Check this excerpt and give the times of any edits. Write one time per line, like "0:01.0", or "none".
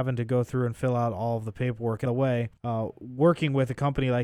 0:02.1
0:02.6